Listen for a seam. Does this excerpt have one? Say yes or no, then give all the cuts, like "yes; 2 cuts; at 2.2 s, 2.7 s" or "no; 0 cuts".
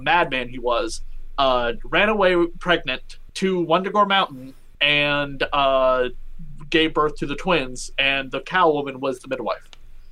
no; 0 cuts